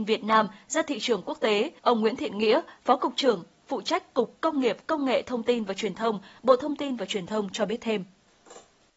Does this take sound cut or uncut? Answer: cut